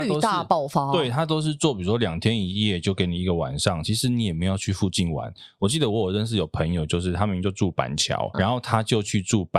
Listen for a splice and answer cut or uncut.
cut